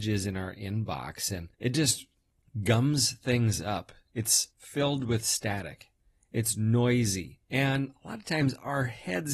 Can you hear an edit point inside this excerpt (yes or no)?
yes